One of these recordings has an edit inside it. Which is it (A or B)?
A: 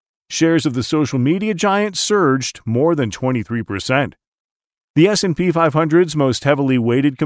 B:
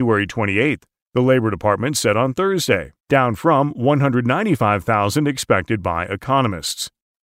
B